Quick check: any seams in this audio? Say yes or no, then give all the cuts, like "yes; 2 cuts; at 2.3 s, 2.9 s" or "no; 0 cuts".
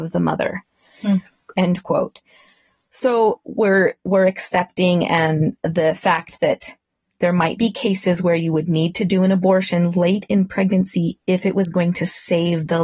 no; 0 cuts